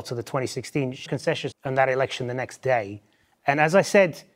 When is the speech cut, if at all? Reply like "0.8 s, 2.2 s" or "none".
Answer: 1.1 s, 1.5 s

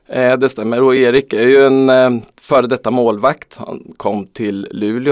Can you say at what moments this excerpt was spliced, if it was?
none

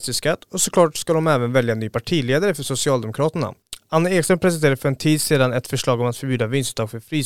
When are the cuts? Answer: none

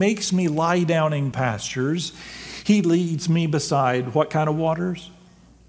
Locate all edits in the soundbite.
1.3 s

